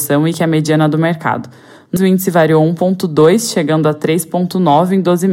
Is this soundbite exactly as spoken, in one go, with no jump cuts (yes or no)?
no